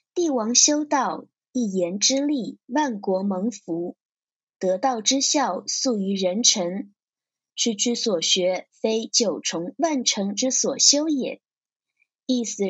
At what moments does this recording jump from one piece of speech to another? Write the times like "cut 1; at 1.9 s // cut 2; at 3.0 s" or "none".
cut 1; at 2.6 s

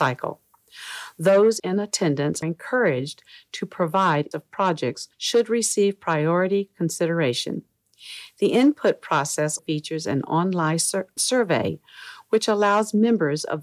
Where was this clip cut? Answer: cut 1; at 1.6 s // cut 2; at 2.4 s // cut 3; at 4.3 s // cut 4; at 5.1 s // cut 5; at 9.6 s // cut 6; at 11.2 s

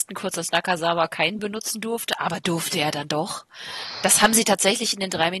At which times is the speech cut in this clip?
cut 1; at 1.4 s

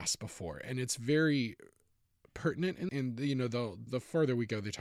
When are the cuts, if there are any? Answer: cut 1; at 2.9 s // cut 2; at 3.9 s

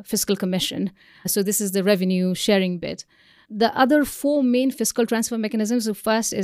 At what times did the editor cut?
none

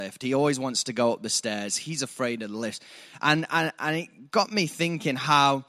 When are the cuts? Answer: none

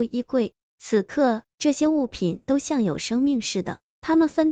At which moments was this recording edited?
cut 1; at 1.5 s

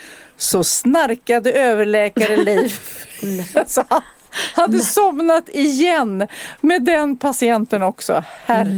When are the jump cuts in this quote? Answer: none

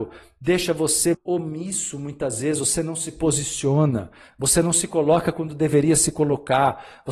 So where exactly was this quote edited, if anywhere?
cut 1; at 1.1 s

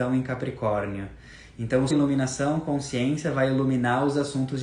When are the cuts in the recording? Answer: cut 1; at 1.9 s

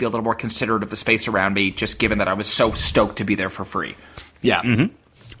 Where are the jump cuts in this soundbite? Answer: none

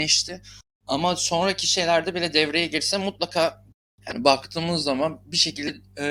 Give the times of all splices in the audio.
none

